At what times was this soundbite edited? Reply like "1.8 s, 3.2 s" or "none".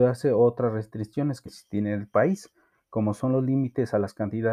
1.5 s